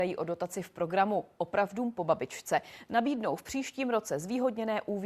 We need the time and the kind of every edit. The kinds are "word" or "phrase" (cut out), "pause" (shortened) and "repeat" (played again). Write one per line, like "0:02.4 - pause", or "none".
none